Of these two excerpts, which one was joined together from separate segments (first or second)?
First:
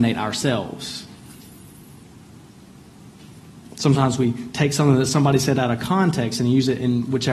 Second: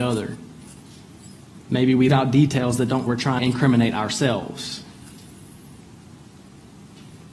second